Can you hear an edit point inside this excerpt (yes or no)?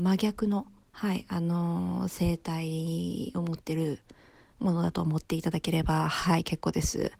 no